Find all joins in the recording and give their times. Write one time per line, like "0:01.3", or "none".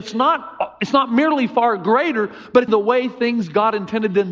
0:02.7